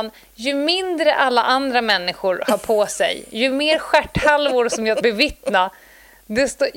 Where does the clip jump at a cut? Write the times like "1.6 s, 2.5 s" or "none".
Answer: 5.0 s